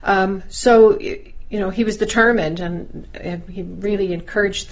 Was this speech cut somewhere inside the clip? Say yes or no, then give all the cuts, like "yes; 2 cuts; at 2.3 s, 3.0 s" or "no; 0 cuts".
no; 0 cuts